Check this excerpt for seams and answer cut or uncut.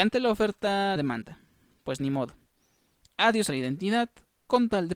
cut